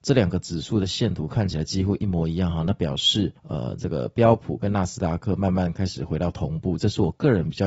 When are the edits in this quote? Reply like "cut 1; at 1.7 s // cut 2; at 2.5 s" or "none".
cut 1; at 3.4 s